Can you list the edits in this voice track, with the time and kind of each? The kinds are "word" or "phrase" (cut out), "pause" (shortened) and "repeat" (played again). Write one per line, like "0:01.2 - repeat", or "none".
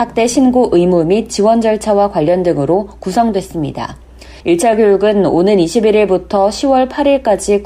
0:04.4 - pause